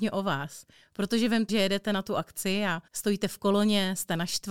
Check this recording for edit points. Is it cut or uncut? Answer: cut